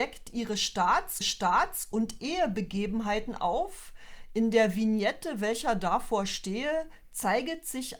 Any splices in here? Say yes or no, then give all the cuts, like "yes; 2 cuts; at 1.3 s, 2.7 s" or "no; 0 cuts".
yes; 1 cut; at 1.2 s